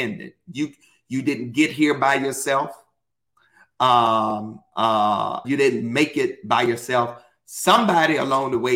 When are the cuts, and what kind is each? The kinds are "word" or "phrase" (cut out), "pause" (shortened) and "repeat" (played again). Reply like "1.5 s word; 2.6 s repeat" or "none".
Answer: 5.4 s word